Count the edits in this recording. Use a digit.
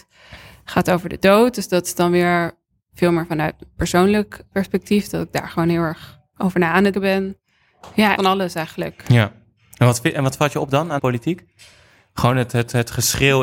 4